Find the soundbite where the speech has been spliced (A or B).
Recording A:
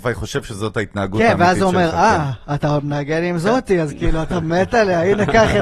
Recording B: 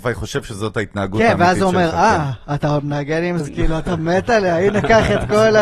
B